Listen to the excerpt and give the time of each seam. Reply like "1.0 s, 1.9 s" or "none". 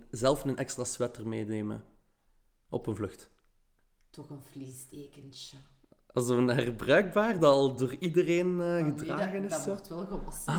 none